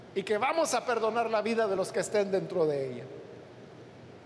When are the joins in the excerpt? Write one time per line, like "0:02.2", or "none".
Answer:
none